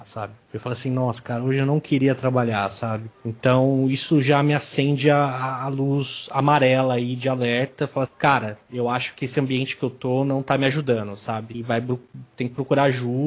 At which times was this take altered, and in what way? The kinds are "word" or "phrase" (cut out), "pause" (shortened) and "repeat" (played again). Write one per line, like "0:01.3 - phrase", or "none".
0:08.1 - word